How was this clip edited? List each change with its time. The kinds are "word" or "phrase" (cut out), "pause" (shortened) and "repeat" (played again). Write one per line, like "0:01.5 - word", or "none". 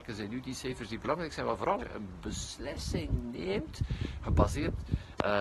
0:01.8 - word

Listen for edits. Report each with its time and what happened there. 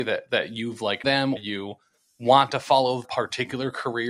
0:01.0 - word
0:01.4 - word
0:03.0 - word

